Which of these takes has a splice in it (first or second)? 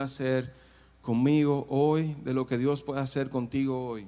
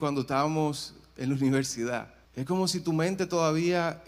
second